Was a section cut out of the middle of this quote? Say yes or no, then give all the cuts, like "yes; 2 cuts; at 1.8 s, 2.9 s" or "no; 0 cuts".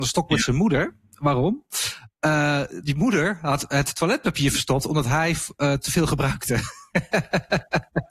no; 0 cuts